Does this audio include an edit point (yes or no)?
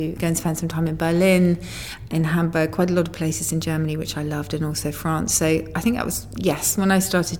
no